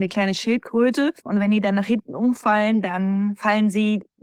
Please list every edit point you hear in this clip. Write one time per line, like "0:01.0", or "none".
0:01.2